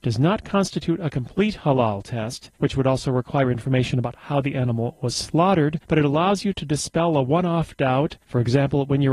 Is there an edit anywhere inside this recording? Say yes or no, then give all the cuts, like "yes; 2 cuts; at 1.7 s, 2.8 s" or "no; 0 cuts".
yes; 3 cuts; at 2.5 s, 5.8 s, 8.2 s